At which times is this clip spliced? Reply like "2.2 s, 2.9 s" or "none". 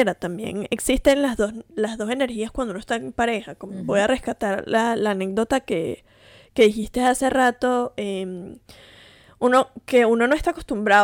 none